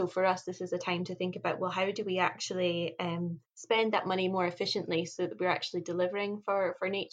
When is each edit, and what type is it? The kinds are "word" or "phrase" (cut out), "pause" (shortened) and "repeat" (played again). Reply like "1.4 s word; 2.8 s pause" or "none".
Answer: 3.4 s pause